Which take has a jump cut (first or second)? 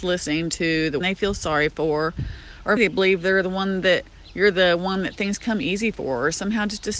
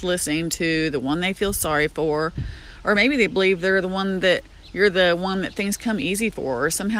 first